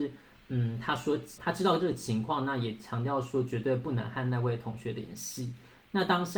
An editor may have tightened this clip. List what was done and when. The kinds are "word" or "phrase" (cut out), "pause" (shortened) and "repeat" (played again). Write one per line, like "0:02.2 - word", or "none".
0:01.4 - word